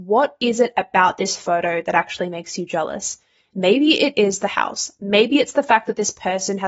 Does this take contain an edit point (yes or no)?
no